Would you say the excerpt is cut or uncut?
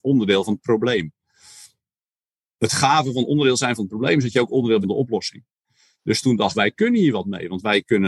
cut